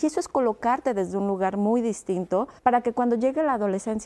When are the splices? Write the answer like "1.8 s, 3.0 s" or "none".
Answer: 2.6 s